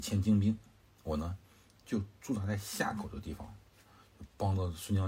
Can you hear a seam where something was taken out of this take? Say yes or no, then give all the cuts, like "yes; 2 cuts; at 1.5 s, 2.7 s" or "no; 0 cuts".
no; 0 cuts